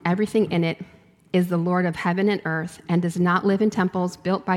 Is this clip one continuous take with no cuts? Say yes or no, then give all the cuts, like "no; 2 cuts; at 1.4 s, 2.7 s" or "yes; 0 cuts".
yes; 0 cuts